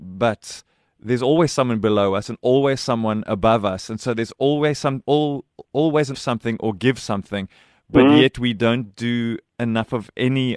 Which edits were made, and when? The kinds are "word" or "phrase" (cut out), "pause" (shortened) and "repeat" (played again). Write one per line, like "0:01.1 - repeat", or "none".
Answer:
0:06.1 - phrase